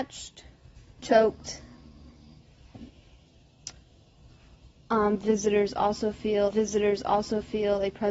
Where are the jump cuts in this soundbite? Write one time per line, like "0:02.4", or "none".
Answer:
0:01.0
0:06.5